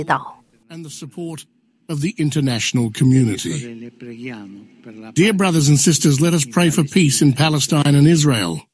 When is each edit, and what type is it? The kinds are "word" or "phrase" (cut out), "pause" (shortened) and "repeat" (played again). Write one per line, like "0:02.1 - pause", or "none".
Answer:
none